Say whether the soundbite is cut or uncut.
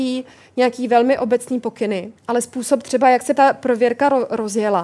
cut